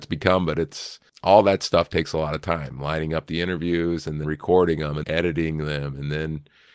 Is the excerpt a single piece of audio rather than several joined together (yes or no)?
no